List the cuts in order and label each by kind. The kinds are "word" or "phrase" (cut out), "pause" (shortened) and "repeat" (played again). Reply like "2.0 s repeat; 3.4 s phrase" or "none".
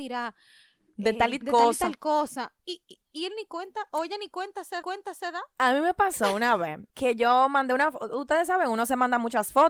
1.4 s word; 2.6 s pause; 4.8 s repeat; 6.9 s pause